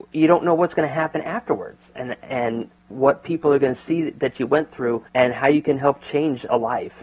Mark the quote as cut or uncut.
cut